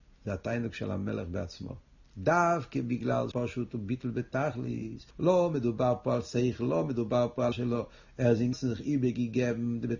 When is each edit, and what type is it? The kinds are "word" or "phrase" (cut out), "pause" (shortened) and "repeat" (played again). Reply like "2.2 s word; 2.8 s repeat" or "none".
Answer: 3.3 s word; 5.1 s pause; 7.5 s word; 8.5 s word